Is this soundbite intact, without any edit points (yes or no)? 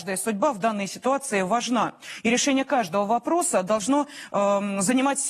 yes